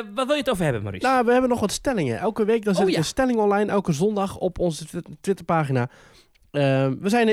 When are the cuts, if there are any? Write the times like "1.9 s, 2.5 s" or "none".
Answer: none